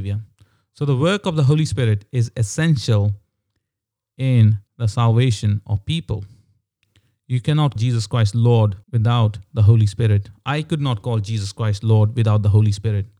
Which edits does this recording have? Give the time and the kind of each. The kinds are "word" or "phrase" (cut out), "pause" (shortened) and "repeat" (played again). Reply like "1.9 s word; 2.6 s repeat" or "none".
4.7 s pause; 7.8 s word; 8.8 s pause